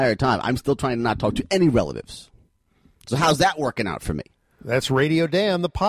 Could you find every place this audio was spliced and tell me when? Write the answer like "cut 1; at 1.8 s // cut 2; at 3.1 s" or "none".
none